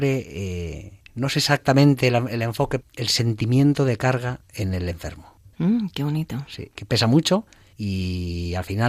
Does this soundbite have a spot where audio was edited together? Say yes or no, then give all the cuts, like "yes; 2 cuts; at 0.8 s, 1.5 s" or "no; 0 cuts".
yes; 1 cut; at 2.8 s